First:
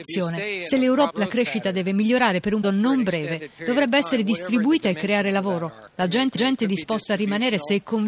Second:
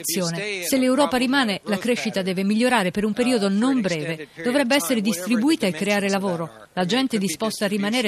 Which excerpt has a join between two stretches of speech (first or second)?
first